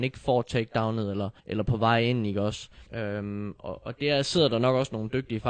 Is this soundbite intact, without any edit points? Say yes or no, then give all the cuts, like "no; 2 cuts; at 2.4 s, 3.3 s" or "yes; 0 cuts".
no; 2 cuts; at 1.4 s, 2.9 s